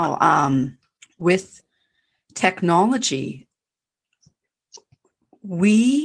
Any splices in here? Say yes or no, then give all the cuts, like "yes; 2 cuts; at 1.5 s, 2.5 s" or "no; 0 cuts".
yes; 1 cut; at 1.0 s